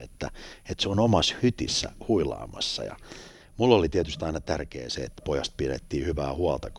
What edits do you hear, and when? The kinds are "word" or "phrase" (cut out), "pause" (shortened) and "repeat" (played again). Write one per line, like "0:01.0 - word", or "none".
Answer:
none